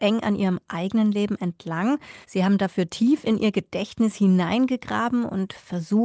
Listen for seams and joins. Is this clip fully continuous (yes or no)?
no